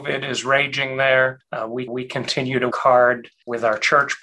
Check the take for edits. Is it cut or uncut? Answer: cut